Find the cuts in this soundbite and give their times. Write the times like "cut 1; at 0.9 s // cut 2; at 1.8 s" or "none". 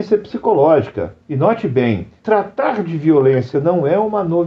cut 1; at 1.2 s // cut 2; at 2.2 s // cut 3; at 3.5 s